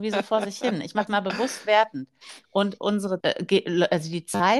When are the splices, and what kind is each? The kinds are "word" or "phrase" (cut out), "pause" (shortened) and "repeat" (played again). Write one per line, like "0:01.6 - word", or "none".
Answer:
0:01.1 - word
0:02.4 - pause
0:03.2 - word